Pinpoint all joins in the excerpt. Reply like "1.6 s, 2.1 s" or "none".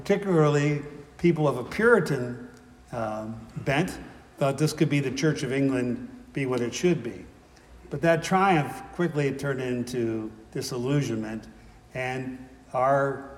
5.1 s